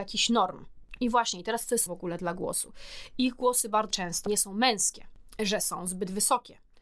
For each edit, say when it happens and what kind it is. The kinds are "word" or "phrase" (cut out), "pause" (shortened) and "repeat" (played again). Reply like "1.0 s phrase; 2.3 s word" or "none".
1.9 s word; 3.9 s word; 4.3 s word